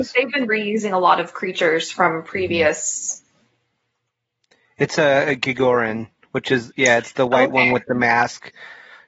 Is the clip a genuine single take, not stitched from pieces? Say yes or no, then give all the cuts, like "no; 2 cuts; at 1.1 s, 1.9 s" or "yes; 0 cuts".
yes; 0 cuts